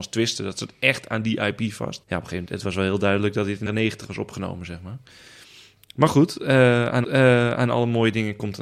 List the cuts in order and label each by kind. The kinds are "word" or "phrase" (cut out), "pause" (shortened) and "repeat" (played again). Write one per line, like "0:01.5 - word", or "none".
0:02.0 - pause
0:03.7 - word
0:07.0 - repeat